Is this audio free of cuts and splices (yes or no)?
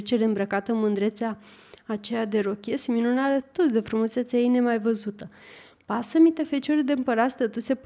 yes